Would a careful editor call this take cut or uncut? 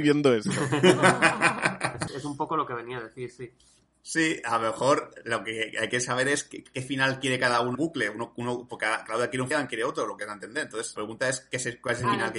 cut